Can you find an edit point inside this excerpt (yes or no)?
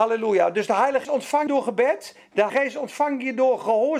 yes